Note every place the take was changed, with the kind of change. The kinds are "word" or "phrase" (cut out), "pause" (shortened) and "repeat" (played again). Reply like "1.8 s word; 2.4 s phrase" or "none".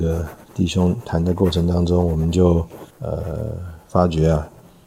2.9 s pause